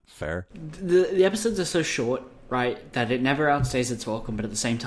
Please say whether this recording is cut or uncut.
uncut